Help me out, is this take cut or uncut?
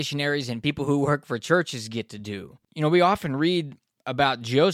cut